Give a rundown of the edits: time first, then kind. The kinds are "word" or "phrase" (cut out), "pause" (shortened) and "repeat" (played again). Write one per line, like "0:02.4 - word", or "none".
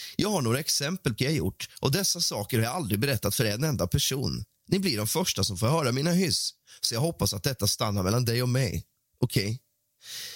0:01.2 - word